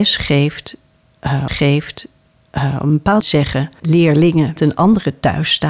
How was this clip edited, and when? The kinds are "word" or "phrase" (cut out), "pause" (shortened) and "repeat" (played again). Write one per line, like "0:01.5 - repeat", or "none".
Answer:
0:01.5 - repeat
0:03.2 - word
0:04.6 - word